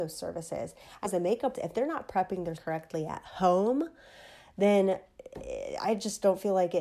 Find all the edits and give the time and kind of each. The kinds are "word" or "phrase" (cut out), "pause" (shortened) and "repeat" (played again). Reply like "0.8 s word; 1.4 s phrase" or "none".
1.0 s word; 1.5 s word; 2.6 s word